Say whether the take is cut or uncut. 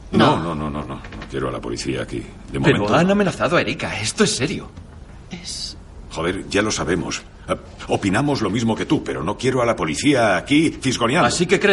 uncut